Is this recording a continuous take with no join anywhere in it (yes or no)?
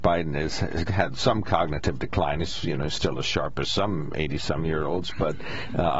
yes